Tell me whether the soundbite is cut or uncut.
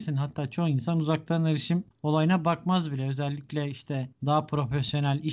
uncut